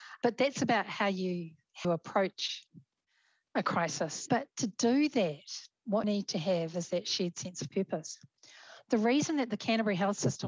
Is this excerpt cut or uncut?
cut